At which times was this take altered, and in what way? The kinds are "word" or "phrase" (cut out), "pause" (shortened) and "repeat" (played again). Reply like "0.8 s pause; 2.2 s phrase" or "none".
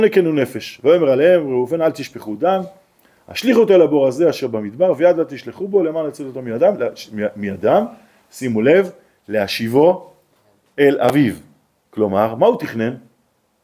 none